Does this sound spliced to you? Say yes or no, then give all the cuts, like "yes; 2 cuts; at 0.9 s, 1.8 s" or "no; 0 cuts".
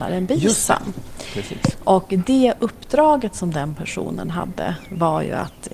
no; 0 cuts